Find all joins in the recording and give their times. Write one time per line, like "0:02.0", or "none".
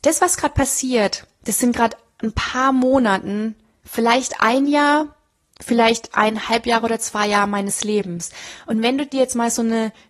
none

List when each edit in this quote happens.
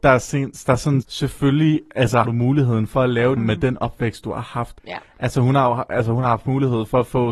0:01.0
0:02.2
0:03.4
0:04.8

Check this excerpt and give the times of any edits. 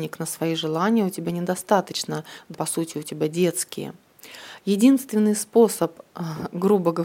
0:02.5

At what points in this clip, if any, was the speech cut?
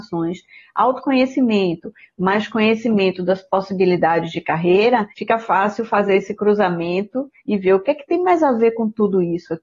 0:05.1
0:07.4

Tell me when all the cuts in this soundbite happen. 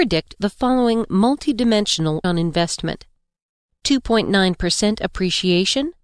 0:02.2

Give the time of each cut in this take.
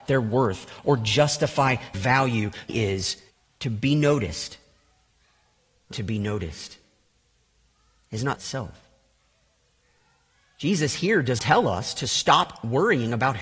0:01.9
0:02.7
0:03.3
0:05.9
0:08.4
0:11.4

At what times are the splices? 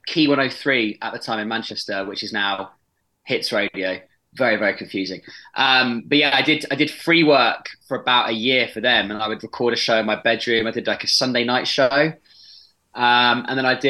none

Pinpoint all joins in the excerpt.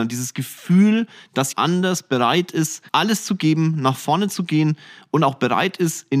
0:01.5
0:02.9

